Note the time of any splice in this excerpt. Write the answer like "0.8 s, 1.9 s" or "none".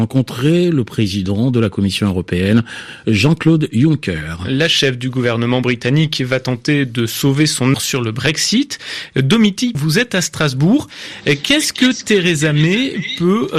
7.7 s, 9.7 s